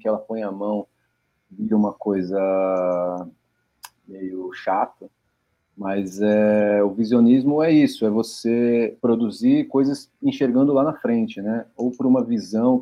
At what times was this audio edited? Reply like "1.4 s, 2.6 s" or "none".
9.0 s